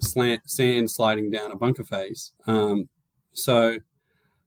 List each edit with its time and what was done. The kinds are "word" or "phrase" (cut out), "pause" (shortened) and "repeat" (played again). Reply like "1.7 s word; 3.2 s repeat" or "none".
2.4 s pause

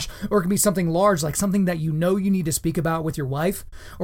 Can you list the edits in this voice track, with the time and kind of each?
none

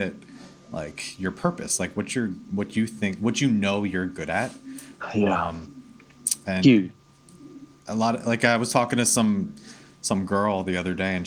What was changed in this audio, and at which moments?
none

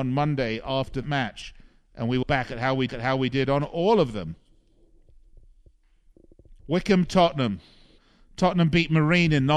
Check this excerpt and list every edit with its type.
1.0 s word; 2.2 s word; 2.9 s repeat; 6.6 s pause; 8.0 s pause

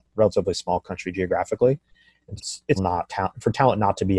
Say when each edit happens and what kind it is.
2.4 s word; 2.8 s word; 3.1 s word

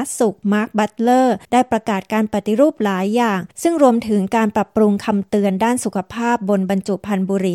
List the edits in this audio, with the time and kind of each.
1.4 s pause; 3.5 s pause

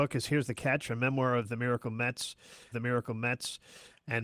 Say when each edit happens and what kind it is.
2.7 s repeat

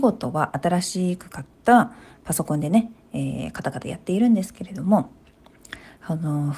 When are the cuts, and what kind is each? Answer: none

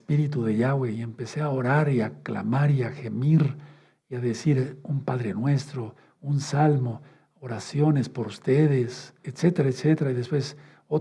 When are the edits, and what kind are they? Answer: 9.2 s word

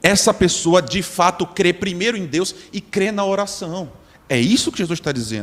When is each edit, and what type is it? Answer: none

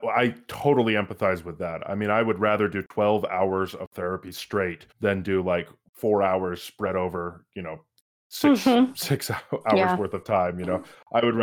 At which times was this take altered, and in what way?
4.9 s pause

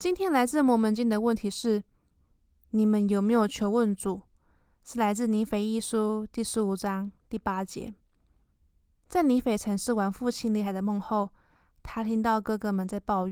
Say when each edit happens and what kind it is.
none

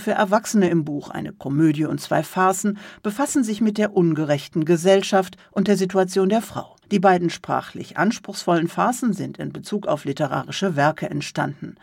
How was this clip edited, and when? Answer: 6.8 s pause

